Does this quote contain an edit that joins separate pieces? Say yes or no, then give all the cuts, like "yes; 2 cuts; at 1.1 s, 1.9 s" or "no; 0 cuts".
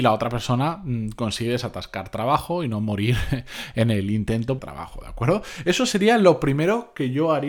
yes; 1 cut; at 4.6 s